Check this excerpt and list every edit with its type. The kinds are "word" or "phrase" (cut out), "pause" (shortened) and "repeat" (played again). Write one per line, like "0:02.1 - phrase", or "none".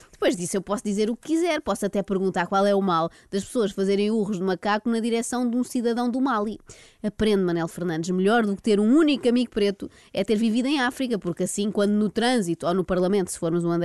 none